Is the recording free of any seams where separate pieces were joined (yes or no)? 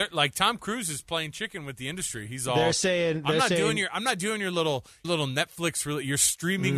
no